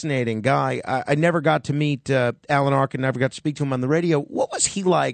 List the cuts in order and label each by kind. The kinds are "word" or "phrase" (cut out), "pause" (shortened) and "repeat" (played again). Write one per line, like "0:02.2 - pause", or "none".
none